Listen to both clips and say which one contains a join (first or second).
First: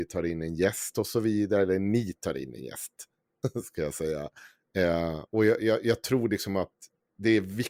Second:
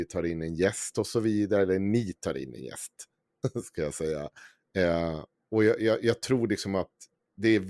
first